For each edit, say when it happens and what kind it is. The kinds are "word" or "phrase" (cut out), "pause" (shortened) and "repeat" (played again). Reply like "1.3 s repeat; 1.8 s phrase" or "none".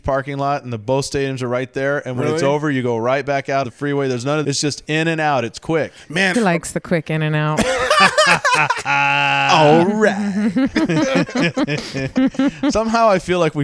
3.6 s word; 4.4 s phrase; 6.3 s phrase